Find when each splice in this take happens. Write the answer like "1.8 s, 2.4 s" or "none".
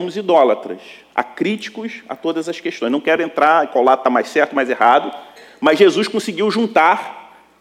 none